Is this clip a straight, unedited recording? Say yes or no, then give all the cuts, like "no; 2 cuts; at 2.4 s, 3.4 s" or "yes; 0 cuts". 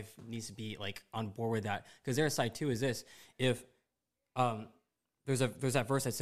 yes; 0 cuts